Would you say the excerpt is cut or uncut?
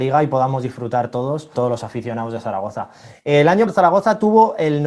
cut